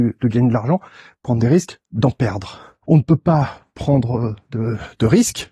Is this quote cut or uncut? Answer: cut